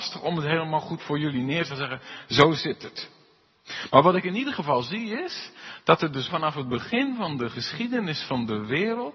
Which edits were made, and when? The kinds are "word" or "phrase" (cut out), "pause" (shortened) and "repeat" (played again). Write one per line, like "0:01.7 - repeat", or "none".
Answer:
0:01.0 - word
0:01.7 - word
0:06.3 - word